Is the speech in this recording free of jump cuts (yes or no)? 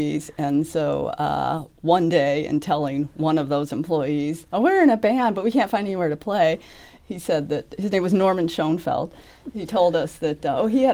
yes